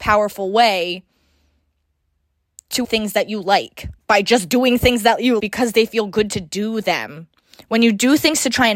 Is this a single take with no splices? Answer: no; 3 cuts; at 2.8 s, 4.0 s, 5.4 s

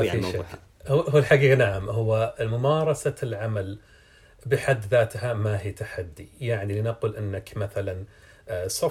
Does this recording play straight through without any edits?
yes; 0 cuts

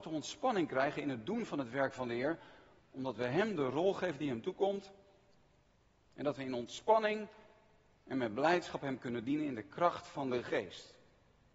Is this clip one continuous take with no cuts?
yes; 0 cuts

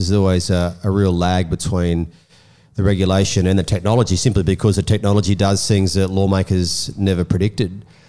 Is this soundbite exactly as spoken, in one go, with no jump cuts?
yes; 0 cuts

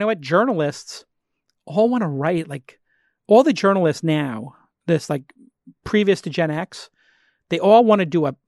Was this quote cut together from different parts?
no; 0 cuts

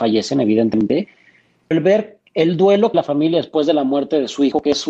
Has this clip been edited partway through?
yes; 3 cuts; at 1.7 s, 2.3 s, 2.9 s

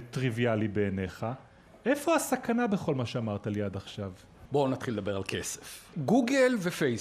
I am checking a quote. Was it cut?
no; 0 cuts

